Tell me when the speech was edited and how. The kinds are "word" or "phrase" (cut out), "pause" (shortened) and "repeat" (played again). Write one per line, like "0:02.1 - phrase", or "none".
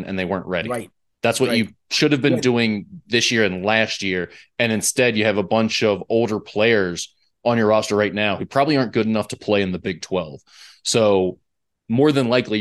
none